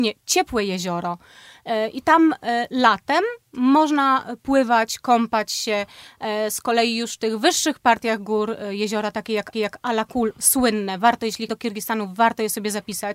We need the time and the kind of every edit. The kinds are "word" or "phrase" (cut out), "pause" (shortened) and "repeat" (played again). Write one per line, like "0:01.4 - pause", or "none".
0:09.5 - repeat
0:11.5 - word